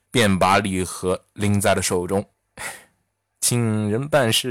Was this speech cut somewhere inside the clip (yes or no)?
no